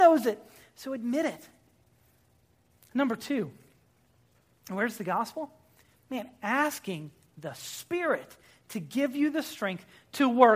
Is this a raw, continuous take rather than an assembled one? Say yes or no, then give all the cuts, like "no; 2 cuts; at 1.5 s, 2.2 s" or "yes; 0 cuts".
yes; 0 cuts